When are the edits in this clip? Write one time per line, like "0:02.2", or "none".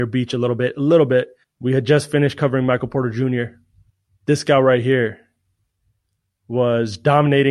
0:01.4
0:03.9